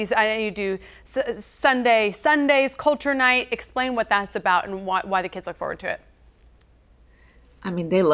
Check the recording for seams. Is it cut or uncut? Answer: uncut